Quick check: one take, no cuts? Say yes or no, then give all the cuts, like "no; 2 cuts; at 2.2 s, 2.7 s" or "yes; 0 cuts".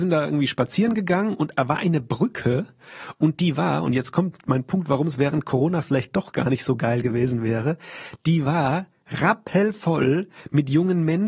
yes; 0 cuts